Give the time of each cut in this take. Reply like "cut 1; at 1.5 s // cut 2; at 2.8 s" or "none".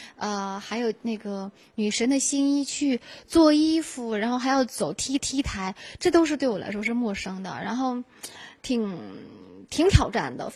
cut 1; at 5.2 s // cut 2; at 8.6 s